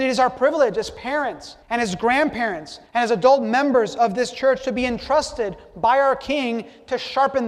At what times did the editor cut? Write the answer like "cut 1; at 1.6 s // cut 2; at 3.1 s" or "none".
cut 1; at 1.6 s // cut 2; at 2.9 s